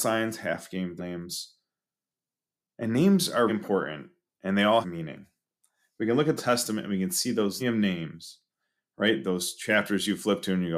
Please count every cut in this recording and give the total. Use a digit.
5